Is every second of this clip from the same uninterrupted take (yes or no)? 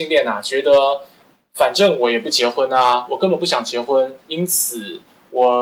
no